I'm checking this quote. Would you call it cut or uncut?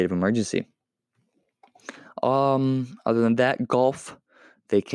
uncut